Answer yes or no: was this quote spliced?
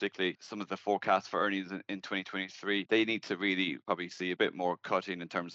no